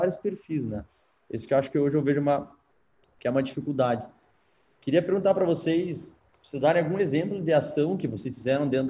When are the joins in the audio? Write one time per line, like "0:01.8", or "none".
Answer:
none